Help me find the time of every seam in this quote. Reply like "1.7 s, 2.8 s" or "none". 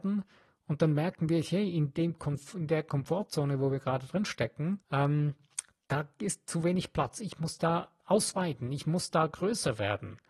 4.8 s